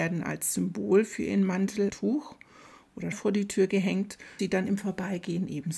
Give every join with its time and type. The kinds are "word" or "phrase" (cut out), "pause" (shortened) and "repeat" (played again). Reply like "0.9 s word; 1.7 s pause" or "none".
1.9 s word; 3.1 s word; 4.4 s word